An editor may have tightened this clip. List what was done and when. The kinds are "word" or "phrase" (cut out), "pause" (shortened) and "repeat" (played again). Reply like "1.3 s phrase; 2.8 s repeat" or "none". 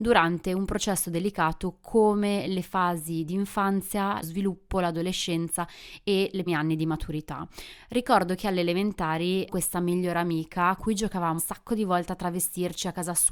4.2 s word; 6.5 s word; 9.5 s word; 10.8 s word; 11.4 s word